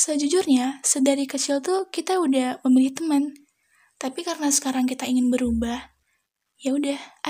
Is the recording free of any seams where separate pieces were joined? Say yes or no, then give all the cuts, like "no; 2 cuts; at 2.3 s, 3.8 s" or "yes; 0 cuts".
yes; 0 cuts